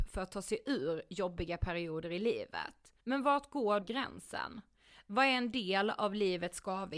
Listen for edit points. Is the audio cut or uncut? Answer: cut